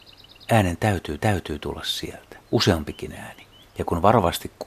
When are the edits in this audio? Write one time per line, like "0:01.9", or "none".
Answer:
0:01.2
0:02.4
0:03.6